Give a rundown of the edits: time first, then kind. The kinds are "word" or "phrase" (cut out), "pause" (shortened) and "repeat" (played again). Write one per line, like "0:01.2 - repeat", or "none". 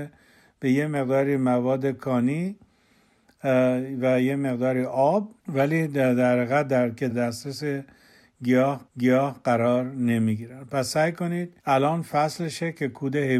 0:05.4 - pause
0:07.1 - word
0:08.9 - repeat
0:11.6 - pause